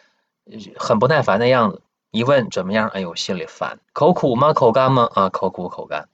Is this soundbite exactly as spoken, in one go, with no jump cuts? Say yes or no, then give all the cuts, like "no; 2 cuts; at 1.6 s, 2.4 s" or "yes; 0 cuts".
no; 2 cuts; at 1.9 s, 3.8 s